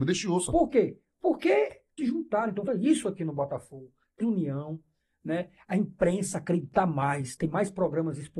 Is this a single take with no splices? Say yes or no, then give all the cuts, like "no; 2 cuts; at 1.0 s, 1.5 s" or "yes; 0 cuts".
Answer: no; 3 cuts; at 2.0 s, 2.7 s, 4.2 s